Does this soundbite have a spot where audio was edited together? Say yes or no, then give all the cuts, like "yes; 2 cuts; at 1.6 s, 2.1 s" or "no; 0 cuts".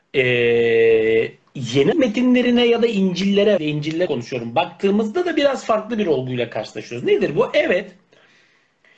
yes; 3 cuts; at 1.9 s, 3.6 s, 4.1 s